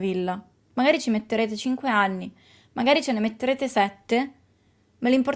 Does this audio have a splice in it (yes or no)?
no